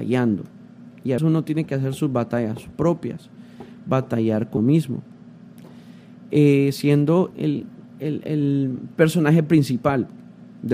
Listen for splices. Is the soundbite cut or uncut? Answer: cut